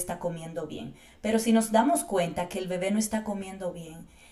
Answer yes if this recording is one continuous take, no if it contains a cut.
yes